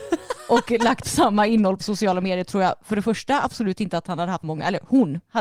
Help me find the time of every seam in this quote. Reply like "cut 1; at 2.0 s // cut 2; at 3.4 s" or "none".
cut 1; at 1.0 s // cut 2; at 1.8 s // cut 3; at 4.4 s